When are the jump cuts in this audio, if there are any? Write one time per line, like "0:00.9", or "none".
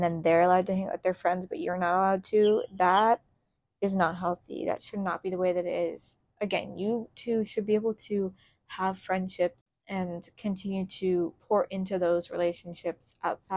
none